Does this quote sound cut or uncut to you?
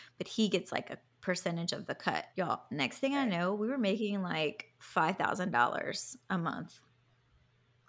cut